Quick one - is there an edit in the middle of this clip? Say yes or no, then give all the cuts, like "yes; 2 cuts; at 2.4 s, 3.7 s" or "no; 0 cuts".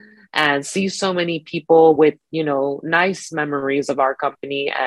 no; 0 cuts